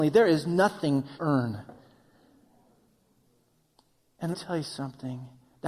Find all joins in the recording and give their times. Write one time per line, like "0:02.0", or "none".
0:01.2
0:04.3